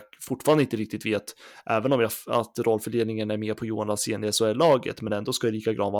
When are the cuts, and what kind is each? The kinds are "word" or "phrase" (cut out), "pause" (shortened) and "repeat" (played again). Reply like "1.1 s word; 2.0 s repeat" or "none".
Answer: none